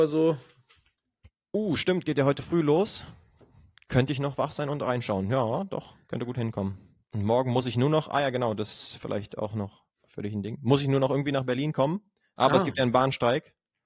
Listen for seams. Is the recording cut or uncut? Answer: uncut